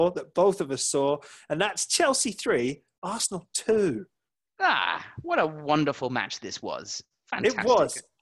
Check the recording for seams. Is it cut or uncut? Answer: uncut